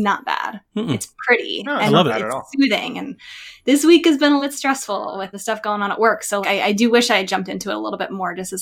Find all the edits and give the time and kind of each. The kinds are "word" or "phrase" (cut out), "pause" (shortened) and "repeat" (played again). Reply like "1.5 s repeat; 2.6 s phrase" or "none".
4.4 s word; 5.3 s word; 6.4 s word